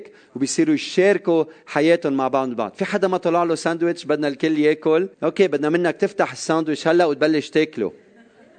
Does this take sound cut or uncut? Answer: cut